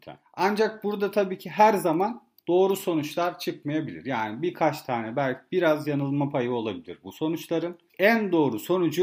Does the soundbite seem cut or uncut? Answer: uncut